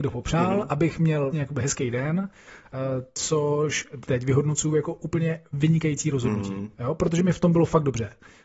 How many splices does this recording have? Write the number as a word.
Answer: two